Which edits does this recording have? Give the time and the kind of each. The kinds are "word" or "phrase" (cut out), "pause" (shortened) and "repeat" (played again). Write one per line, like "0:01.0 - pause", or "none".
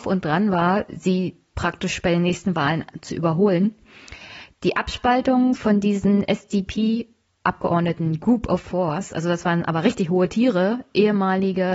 none